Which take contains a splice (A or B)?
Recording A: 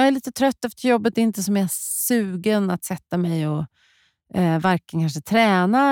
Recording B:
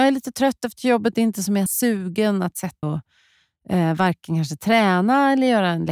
B